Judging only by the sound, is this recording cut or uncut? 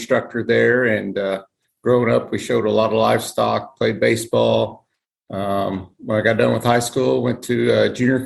uncut